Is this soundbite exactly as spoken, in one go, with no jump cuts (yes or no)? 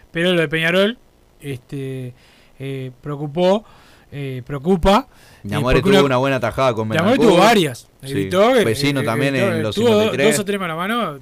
no